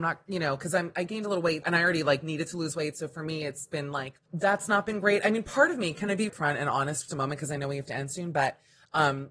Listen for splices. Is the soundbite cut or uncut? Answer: cut